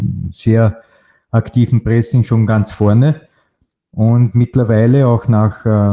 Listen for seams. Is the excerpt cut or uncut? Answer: uncut